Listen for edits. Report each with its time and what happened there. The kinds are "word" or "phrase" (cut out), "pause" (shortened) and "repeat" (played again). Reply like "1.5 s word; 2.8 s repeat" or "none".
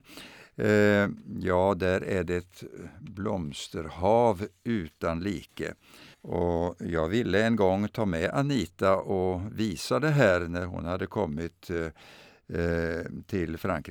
6.1 s pause